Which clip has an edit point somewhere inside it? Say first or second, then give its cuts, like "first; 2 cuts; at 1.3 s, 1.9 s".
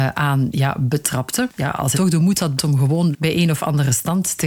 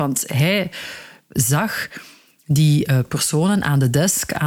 first; 4 cuts; at 1.6 s, 1.9 s, 2.6 s, 3.1 s